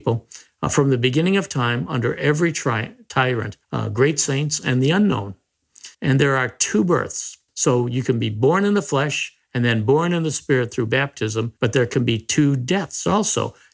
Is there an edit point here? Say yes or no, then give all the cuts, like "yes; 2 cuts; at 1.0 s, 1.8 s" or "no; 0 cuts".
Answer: yes; 4 cuts; at 3.6 s, 5.9 s, 7.5 s, 11.6 s